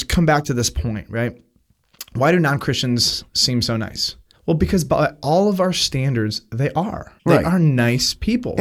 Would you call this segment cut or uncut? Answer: cut